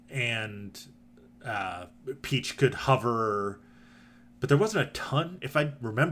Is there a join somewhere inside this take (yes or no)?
no